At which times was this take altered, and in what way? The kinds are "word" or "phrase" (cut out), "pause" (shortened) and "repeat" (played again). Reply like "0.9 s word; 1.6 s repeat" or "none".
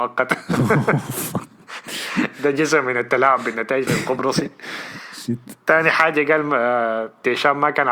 3.9 s word